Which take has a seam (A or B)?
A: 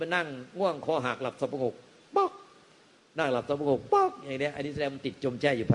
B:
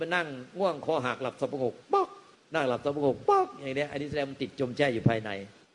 B